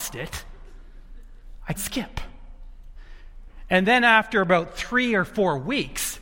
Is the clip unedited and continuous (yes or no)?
no